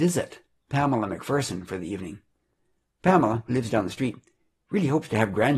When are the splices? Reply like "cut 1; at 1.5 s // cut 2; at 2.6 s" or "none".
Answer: none